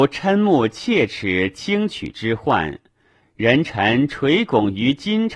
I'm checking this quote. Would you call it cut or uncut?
uncut